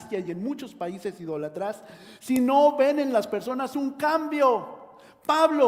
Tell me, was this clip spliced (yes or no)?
no